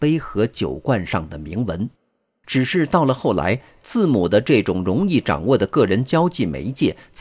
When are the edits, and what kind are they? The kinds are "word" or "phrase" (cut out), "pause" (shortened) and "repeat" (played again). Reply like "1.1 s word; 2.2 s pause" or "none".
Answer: none